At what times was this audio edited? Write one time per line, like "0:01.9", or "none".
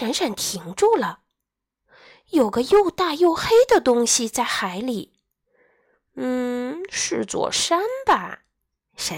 none